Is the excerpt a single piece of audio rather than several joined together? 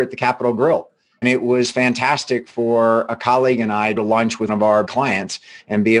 no; 4 cuts; at 1.2 s, 4.0 s, 4.5 s, 4.8 s

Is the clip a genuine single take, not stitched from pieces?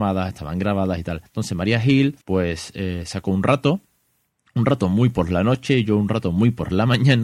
no; 2 cuts; at 1.3 s, 2.2 s

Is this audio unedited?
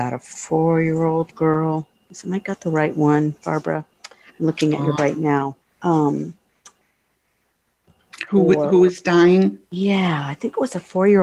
no; 3 cuts; at 1.3 s, 5.0 s, 5.6 s

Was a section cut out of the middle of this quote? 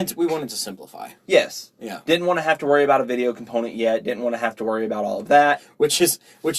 no; 0 cuts

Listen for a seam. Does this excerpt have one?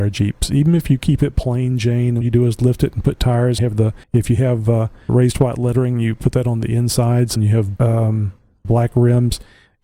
yes; 7 cuts; at 2.2 s, 3.6 s, 4.0 s, 5.1 s, 7.4 s, 7.8 s, 8.6 s

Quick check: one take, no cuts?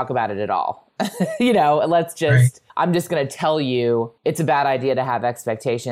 no; 2 cuts; at 2.7 s, 4.2 s

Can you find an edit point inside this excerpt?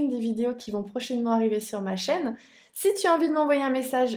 no; 0 cuts

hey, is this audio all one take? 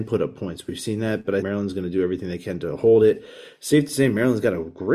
no; 1 cut; at 1.4 s

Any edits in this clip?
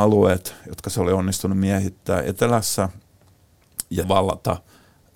yes; 1 cut; at 4.0 s

